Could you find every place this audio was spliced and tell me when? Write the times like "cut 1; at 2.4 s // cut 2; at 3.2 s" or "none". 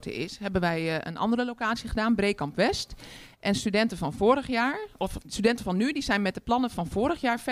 cut 1; at 5.2 s